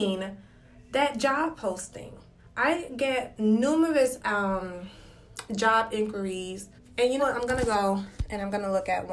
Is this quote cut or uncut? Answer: cut